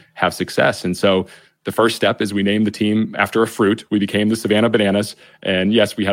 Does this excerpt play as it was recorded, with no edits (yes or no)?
yes